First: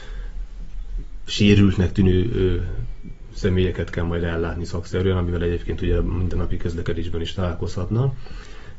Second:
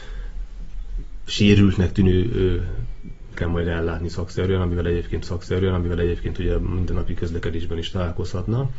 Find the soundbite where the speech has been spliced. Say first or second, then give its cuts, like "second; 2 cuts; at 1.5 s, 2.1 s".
second; 2 cuts; at 3.3 s, 5.2 s